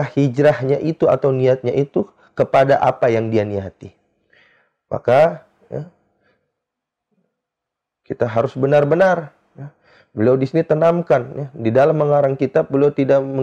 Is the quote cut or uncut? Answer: uncut